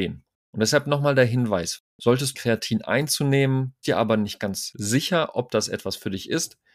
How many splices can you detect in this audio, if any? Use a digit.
2